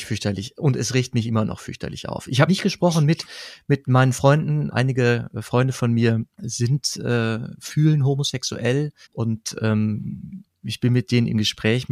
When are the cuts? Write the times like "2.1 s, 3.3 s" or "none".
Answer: 2.5 s, 4.7 s, 6.3 s, 9.0 s